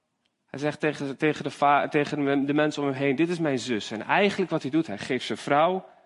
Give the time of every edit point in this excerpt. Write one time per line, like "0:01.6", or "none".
none